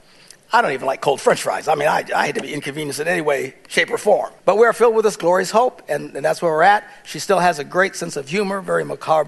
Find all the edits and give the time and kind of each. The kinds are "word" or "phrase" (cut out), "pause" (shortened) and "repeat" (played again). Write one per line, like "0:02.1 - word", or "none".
0:04.4 - pause